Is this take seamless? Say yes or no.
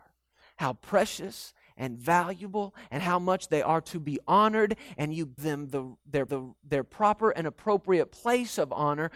no